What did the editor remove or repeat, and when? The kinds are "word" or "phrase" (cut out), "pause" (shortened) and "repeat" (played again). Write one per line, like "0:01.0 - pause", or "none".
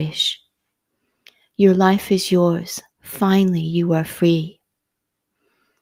0:02.9 - pause